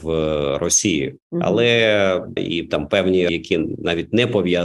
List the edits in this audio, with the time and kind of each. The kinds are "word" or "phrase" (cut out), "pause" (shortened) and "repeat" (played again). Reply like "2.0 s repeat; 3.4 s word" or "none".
1.2 s pause; 2.4 s word; 3.3 s word